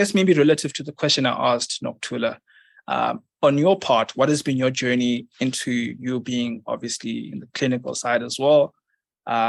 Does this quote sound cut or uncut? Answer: uncut